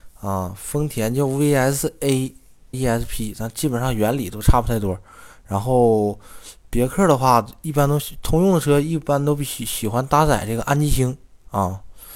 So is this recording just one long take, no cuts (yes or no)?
no